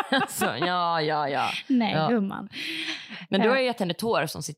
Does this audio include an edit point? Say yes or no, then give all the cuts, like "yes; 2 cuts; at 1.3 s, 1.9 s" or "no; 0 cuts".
no; 0 cuts